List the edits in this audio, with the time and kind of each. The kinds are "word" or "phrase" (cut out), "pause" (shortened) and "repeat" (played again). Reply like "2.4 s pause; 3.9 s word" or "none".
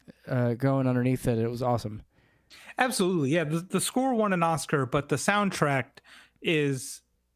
none